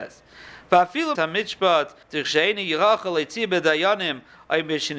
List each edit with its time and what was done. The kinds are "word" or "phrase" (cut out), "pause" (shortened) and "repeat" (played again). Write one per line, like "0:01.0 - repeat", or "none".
0:01.2 - phrase
0:02.0 - pause